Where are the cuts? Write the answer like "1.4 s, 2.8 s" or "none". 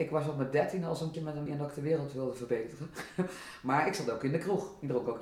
1.1 s, 1.5 s